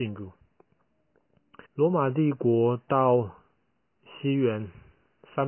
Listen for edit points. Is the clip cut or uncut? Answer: cut